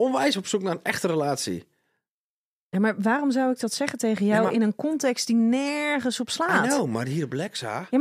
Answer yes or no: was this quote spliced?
no